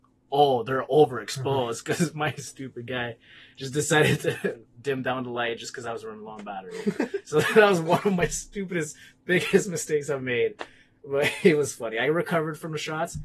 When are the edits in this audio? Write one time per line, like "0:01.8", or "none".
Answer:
none